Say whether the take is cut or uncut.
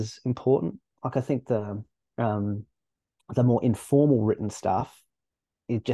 uncut